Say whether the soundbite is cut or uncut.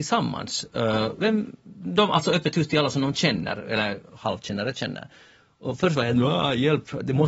uncut